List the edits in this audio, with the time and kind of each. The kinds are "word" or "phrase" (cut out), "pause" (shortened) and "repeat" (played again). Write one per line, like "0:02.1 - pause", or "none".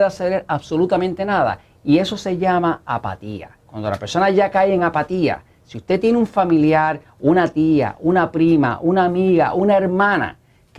0:03.6 - pause